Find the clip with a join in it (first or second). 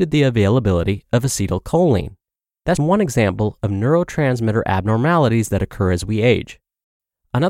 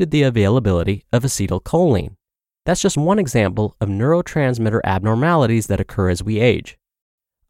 first